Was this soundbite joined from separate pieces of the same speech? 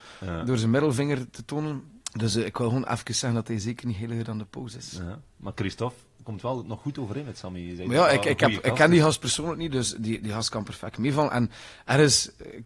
yes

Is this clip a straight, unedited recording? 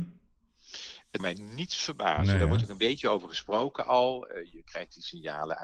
no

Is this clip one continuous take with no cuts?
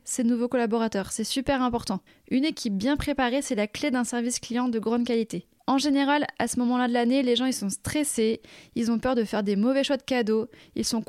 no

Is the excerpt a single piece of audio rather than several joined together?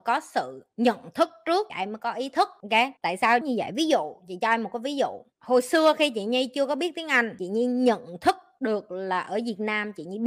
no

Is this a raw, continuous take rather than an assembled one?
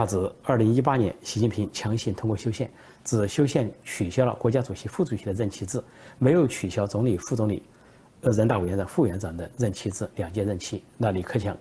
yes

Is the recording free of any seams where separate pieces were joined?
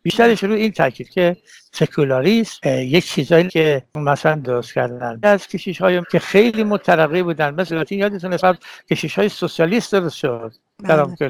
no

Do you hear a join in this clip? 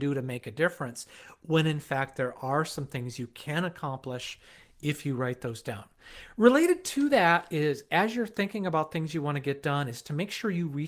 no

